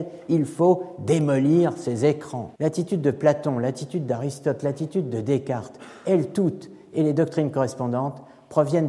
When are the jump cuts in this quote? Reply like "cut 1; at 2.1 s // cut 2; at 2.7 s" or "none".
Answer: cut 1; at 2.6 s

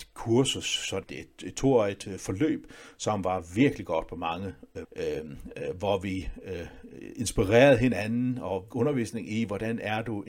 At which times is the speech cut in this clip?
cut 1; at 1.0 s // cut 2; at 4.8 s // cut 3; at 8.7 s

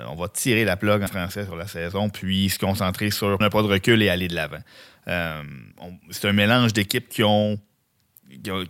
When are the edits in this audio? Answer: cut 1; at 1.1 s // cut 2; at 3.4 s // cut 3; at 5.7 s

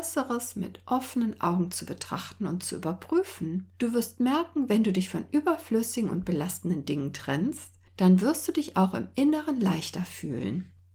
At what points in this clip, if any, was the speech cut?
cut 1; at 3.7 s

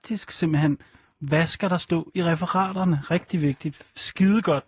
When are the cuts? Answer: none

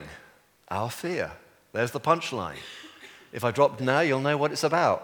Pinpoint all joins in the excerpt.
cut 1; at 3.8 s

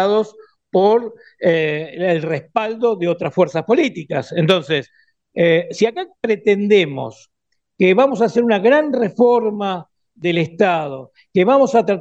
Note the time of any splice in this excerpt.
none

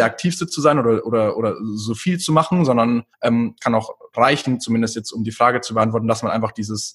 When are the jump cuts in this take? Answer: cut 1; at 3.1 s

